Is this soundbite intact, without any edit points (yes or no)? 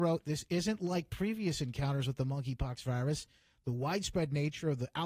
yes